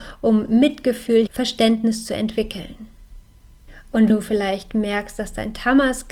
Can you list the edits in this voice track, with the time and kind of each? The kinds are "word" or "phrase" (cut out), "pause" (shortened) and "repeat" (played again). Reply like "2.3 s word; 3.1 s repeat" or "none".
1.3 s word; 4.1 s word